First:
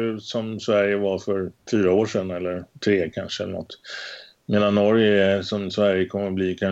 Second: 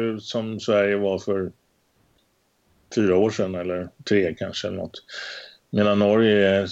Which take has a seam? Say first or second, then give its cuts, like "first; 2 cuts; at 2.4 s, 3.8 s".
first; 1 cut; at 1.6 s